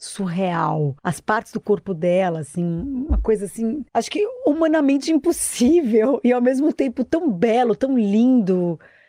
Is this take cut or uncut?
cut